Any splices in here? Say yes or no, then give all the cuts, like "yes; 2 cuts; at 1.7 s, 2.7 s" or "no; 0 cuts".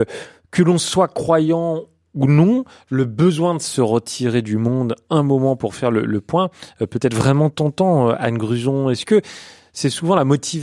no; 0 cuts